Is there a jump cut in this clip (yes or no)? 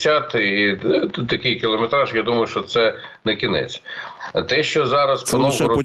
no